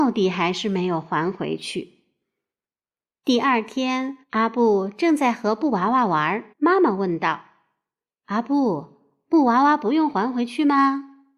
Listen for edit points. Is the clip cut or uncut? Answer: cut